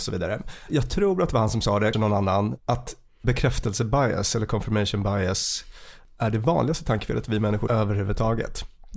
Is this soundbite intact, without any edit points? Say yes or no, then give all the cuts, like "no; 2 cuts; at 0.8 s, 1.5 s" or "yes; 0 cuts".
no; 3 cuts; at 1.9 s, 2.6 s, 7.7 s